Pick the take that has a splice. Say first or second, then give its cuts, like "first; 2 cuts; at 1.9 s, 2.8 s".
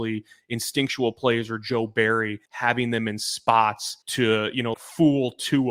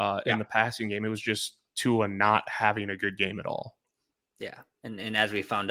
first; 3 cuts; at 2.5 s, 4.0 s, 4.7 s